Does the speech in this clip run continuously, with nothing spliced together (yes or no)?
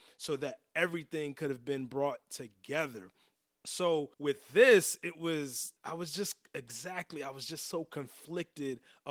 no